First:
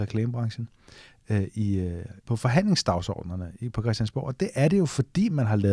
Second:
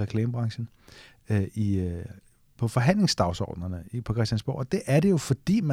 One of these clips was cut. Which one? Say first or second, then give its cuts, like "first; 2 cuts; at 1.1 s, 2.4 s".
first; 1 cut; at 2.2 s